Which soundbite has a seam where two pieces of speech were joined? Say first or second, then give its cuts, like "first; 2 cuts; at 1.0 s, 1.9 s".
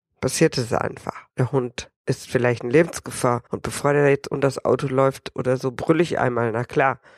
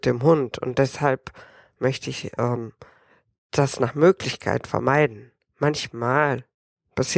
first; 2 cuts; at 1.3 s, 3.5 s